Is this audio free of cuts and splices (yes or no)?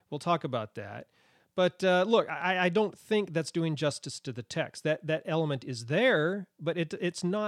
yes